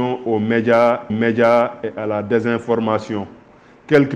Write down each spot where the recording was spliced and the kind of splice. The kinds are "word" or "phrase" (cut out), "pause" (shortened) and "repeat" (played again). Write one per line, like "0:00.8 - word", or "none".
0:01.1 - repeat